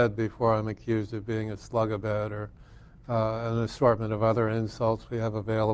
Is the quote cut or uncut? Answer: uncut